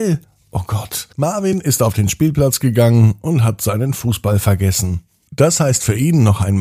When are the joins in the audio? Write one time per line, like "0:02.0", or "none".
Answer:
0:01.1